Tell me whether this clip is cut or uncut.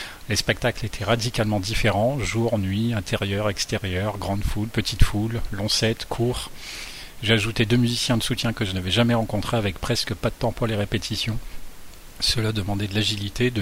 uncut